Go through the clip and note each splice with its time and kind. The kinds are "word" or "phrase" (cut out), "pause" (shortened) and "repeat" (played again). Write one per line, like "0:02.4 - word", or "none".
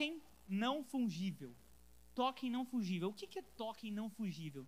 none